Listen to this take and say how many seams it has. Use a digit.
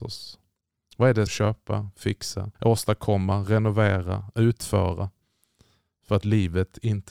3